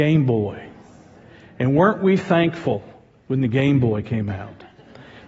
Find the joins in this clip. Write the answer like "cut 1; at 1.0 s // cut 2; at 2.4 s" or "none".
none